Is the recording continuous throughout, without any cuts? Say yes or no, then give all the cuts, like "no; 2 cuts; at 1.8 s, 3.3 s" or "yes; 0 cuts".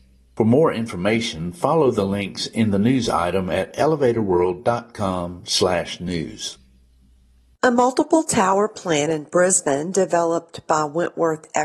yes; 0 cuts